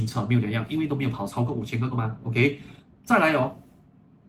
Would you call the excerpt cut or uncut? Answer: cut